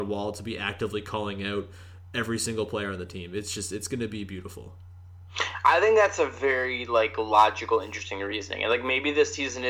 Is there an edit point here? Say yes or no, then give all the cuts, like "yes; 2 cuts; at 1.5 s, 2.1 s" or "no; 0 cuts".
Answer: no; 0 cuts